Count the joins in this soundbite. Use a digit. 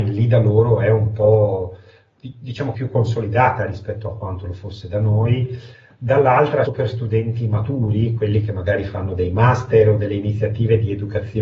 3